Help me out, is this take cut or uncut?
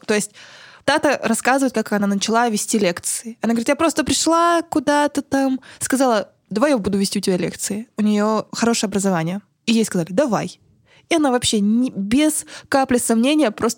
uncut